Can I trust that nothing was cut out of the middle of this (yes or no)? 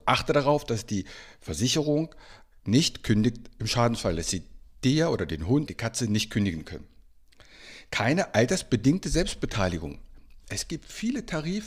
no